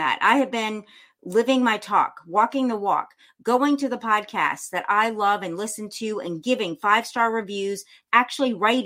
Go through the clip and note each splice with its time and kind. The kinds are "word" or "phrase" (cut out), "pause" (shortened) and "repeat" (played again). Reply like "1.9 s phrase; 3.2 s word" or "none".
none